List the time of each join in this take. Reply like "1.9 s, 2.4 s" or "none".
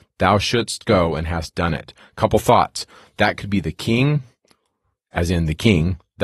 none